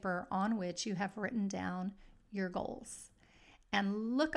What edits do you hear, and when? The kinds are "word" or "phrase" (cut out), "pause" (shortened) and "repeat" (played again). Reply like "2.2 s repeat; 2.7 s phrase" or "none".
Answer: none